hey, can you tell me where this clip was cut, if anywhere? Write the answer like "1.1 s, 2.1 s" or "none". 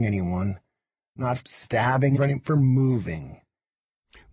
1.4 s, 2.2 s